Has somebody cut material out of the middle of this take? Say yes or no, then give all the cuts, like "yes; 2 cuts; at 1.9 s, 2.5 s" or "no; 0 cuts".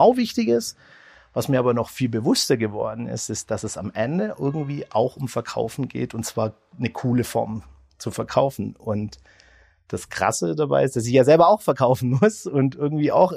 no; 0 cuts